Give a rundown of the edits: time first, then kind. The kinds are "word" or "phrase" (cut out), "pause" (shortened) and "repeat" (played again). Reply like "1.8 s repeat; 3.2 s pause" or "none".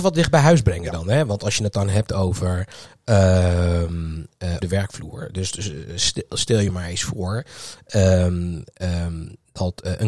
4.6 s word; 5.5 s word

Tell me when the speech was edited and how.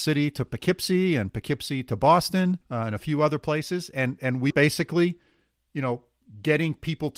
2.6 s pause; 4.5 s word

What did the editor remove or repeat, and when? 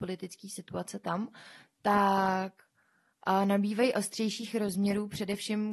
none

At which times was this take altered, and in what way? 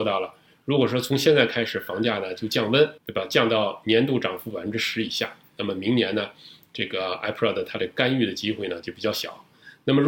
3.0 s pause

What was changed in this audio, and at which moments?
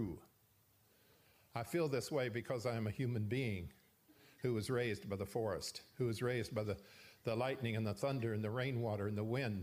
none

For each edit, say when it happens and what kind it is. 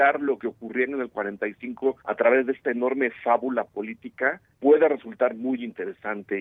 2.0 s pause; 4.5 s pause

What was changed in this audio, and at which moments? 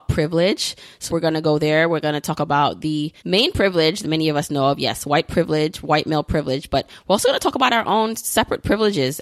1.1 s word; 3.2 s pause; 4.0 s word

